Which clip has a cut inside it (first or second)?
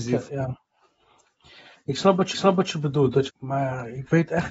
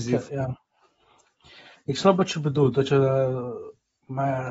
first